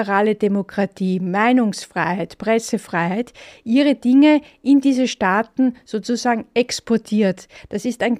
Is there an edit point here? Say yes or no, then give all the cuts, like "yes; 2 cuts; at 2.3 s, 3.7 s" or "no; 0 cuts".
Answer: no; 0 cuts